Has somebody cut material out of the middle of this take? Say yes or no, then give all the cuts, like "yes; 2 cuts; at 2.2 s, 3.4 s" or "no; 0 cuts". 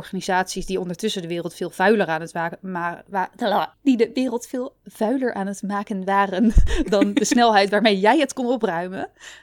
yes; 1 cut; at 3.7 s